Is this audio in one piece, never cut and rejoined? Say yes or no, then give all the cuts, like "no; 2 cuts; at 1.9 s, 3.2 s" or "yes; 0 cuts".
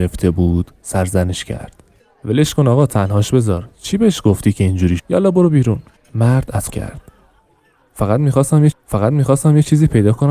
no; 5 cuts; at 2.0 s, 5.0 s, 6.0 s, 6.7 s, 8.7 s